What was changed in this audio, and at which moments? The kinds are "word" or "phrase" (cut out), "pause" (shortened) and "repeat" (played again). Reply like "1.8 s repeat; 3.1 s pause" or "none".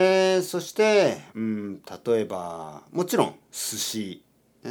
1.3 s pause